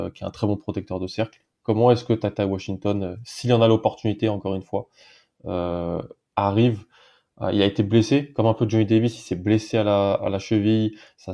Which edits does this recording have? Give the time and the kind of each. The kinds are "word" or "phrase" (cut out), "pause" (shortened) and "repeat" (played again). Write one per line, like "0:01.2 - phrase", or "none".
none

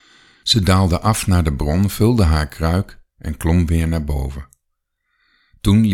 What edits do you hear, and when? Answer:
none

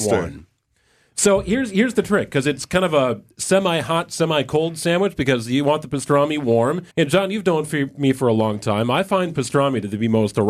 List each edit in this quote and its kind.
0:06.9 - pause

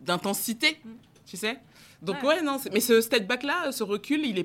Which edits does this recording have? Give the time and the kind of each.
none

